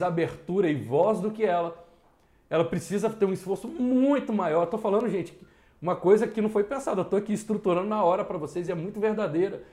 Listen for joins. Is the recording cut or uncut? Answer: uncut